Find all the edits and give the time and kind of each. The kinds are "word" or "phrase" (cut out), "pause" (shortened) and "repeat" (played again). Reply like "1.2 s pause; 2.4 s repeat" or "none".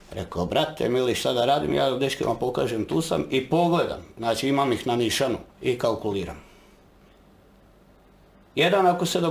5.5 s pause